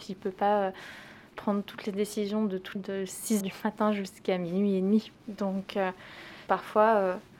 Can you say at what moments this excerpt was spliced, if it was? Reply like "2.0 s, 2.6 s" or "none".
2.7 s, 3.4 s, 5.2 s, 6.5 s